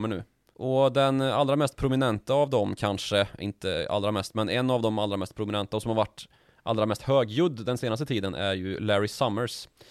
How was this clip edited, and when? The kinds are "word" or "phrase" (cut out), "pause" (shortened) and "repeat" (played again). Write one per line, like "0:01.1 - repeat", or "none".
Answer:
none